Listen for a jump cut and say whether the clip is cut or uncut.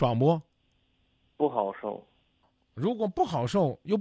uncut